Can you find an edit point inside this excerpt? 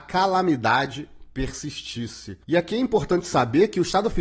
yes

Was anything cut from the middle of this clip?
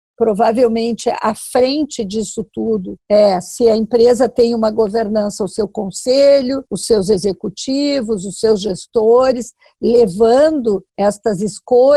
yes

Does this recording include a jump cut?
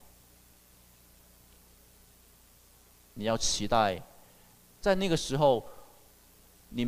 no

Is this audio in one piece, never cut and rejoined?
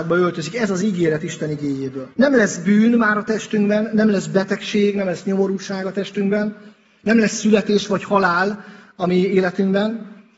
no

